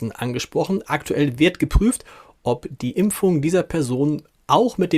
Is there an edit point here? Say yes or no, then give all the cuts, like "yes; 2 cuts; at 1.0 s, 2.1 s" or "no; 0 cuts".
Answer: no; 0 cuts